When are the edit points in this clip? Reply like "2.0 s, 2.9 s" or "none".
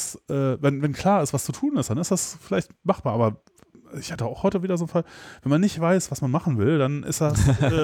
none